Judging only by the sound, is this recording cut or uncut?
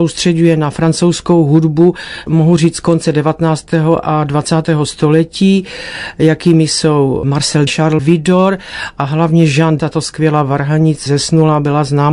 cut